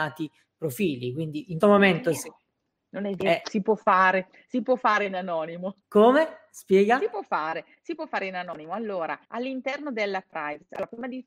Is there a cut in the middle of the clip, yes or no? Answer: yes